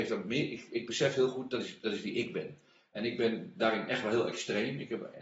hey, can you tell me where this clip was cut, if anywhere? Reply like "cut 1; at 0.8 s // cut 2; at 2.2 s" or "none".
none